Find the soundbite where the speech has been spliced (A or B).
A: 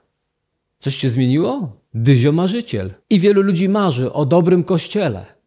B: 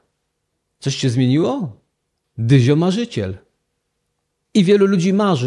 A